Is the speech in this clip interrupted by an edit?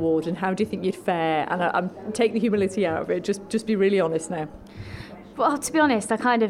no; 0 cuts

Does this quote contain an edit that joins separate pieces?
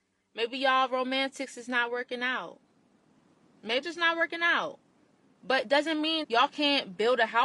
yes; 2 cuts; at 3.8 s, 6.2 s

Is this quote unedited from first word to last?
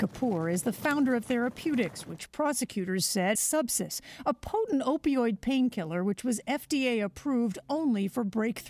no; 2 cuts; at 1.2 s, 3.4 s

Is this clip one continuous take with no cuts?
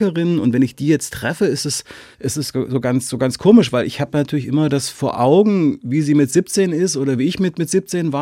no; 1 cut; at 2.1 s

